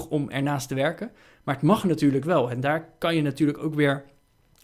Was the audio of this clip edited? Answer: no; 0 cuts

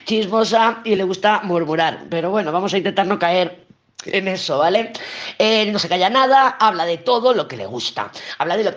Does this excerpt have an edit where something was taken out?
no; 0 cuts

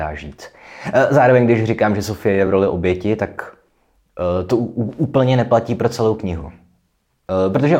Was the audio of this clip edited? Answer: no; 0 cuts

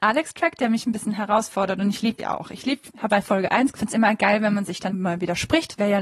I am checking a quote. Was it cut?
yes; 4 cuts; at 2.2 s, 3.1 s, 3.7 s, 4.9 s

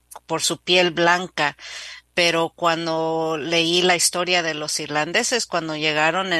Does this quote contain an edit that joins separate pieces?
no; 0 cuts

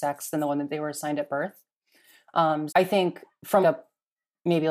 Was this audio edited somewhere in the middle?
yes; 2 cuts; at 2.7 s, 3.6 s

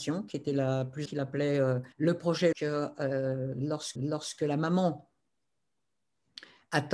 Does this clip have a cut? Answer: yes; 4 cuts; at 1.1 s, 1.9 s, 2.5 s, 4.0 s

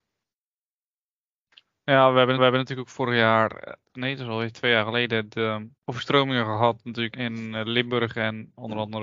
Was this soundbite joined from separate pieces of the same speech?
yes; 4 cuts; at 2.4 s, 3.8 s, 5.7 s, 7.1 s

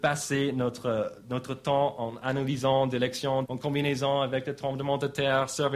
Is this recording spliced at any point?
yes; 1 cut; at 3.4 s

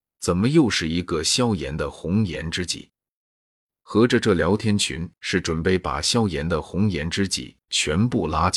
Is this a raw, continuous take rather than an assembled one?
yes; 0 cuts

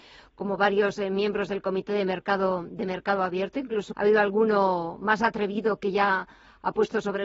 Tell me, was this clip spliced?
yes; 1 cut; at 3.9 s

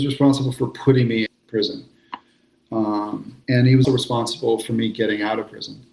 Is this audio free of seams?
no; 3 cuts; at 1.3 s, 3.4 s, 3.8 s

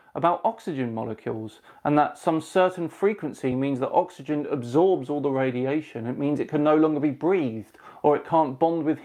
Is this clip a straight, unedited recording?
yes; 0 cuts

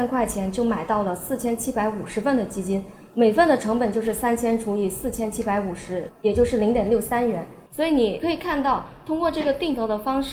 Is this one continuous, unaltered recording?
no; 1 cut; at 7.7 s

